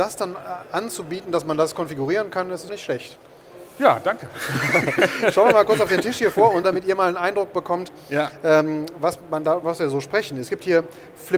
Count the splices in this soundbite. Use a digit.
3